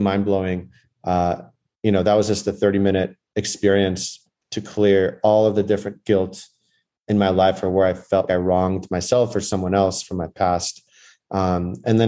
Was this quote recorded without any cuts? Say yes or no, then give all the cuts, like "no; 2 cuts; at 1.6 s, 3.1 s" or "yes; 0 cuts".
no; 1 cut; at 8.3 s